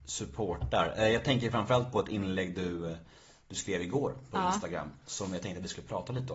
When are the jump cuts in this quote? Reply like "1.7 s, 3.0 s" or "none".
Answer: none